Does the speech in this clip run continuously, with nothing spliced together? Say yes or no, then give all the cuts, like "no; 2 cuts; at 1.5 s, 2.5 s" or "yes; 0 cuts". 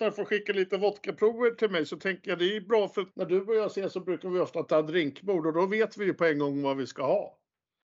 no; 1 cut; at 3.1 s